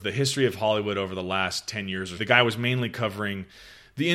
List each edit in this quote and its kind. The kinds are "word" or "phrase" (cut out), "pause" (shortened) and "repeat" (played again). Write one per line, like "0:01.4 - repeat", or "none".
0:02.2 - phrase